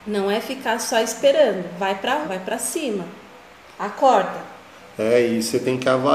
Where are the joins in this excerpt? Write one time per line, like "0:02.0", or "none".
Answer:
0:02.2